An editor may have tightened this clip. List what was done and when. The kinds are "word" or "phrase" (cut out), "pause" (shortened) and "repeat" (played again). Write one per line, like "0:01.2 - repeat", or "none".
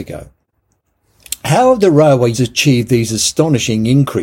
0:02.3 - word